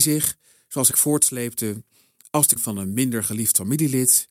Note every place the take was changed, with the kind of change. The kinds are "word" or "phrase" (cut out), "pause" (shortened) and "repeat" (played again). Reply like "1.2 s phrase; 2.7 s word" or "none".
0.9 s phrase; 2.6 s word

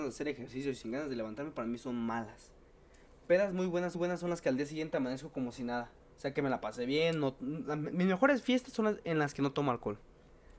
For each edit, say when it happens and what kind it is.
3.9 s repeat; 6.0 s pause

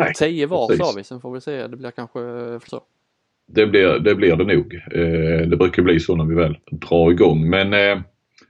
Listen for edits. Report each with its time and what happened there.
2.7 s word; 6.6 s pause

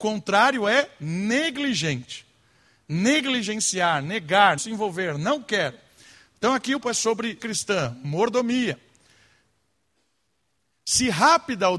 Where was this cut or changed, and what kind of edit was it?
4.6 s word; 6.8 s word; 7.4 s word

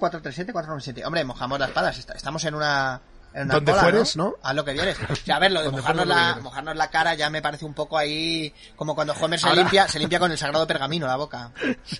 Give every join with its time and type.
3.2 s pause

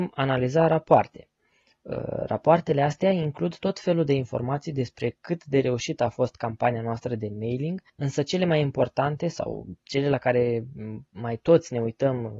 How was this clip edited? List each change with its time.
7.9 s pause

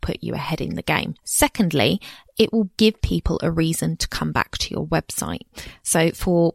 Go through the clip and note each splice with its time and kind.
1.2 s pause

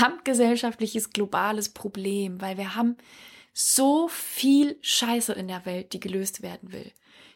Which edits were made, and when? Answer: none

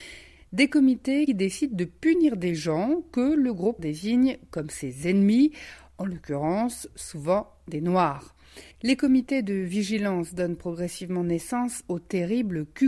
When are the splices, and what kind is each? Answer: 1.3 s word; 3.8 s word; 8.7 s pause

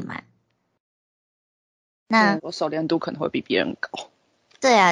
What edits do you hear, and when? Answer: 2.4 s word

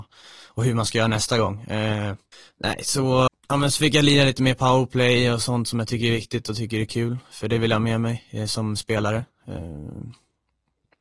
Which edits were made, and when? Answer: 2.3 s pause; 3.3 s word

